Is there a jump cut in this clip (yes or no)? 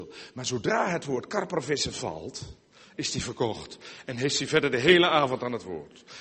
no